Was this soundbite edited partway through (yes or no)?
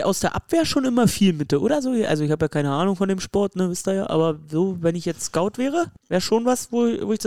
yes